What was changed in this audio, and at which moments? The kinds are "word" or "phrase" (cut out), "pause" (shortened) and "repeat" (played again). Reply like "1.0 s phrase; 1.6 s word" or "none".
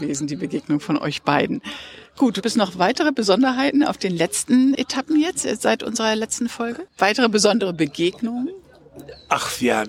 2.4 s word; 4.7 s word; 6.9 s pause